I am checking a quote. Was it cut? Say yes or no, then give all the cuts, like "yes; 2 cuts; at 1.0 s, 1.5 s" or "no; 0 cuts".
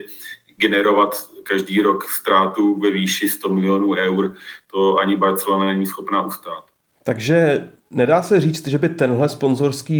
yes; 1 cut; at 7.8 s